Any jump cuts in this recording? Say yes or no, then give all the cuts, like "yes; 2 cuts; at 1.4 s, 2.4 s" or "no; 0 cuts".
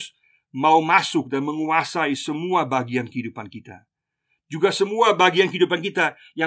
no; 0 cuts